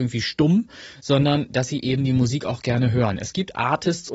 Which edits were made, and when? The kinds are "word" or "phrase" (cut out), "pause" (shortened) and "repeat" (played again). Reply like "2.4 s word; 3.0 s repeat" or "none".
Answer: none